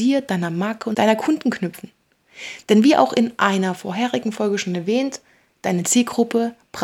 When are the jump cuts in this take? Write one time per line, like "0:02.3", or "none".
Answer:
none